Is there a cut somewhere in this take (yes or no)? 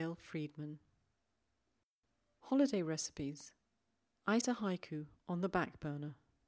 yes